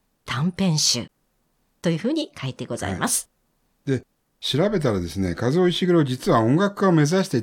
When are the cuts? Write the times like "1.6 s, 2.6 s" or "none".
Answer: none